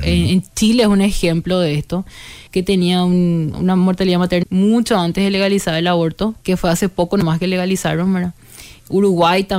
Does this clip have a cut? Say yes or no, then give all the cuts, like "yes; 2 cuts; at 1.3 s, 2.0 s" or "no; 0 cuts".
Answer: yes; 4 cuts; at 2.5 s, 3.5 s, 4.4 s, 6.4 s